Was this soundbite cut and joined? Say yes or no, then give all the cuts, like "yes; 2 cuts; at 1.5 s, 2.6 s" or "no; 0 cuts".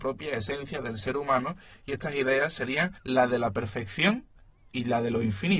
yes; 1 cut; at 3.0 s